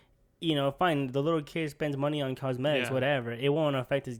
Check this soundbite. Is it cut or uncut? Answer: uncut